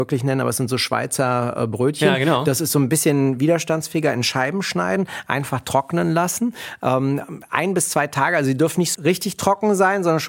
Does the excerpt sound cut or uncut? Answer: cut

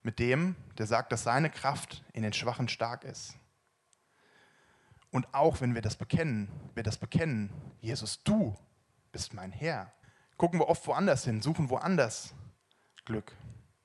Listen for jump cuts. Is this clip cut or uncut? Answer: cut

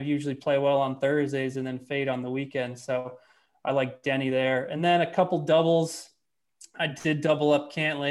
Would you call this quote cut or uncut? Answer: uncut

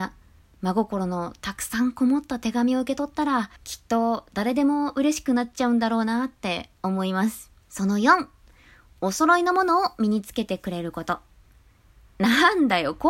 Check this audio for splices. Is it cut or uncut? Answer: cut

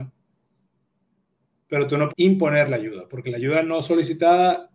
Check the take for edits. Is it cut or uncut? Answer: cut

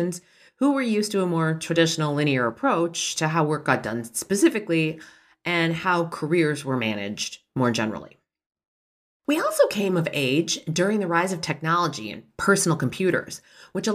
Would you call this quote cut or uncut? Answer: uncut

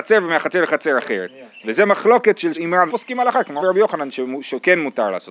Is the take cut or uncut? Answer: cut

